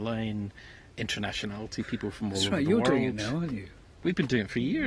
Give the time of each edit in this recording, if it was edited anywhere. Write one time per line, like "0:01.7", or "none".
none